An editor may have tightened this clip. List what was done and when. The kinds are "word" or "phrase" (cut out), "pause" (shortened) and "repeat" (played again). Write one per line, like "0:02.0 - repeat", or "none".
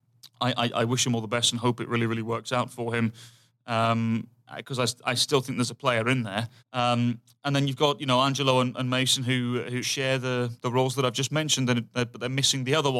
0:06.6 - pause
0:09.8 - word

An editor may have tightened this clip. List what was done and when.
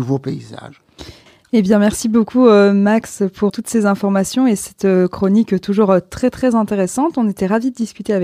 0:03.5 - word

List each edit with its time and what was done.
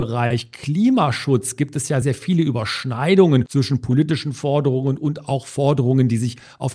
0:02.0 - word

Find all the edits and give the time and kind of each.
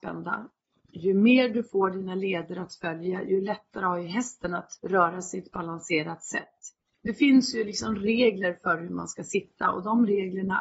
0:04.8 - pause
0:06.9 - pause

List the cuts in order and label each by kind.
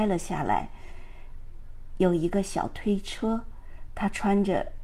0:03.9 - phrase

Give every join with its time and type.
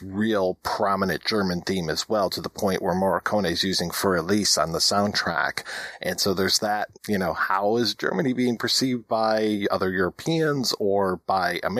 0:07.0 - pause

